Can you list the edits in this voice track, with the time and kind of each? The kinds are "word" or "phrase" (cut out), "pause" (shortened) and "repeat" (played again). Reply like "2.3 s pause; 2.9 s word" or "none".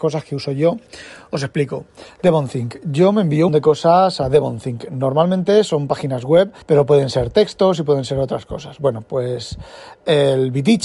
3.5 s phrase; 6.6 s pause